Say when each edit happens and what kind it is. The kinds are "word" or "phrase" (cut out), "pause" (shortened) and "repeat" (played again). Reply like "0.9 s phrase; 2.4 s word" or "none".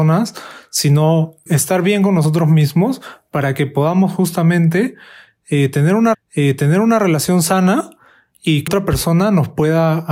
1.5 s word; 6.1 s repeat; 8.7 s word